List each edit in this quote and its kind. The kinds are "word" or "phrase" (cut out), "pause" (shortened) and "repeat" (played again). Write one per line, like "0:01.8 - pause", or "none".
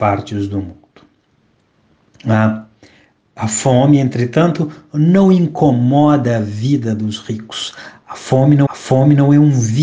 0:08.7 - repeat